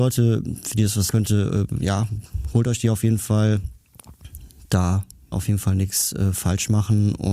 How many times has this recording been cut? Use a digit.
2